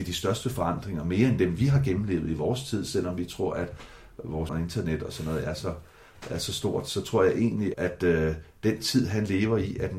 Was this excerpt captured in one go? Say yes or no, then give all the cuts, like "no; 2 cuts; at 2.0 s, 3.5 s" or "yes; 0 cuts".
no; 2 cuts; at 4.5 s, 7.7 s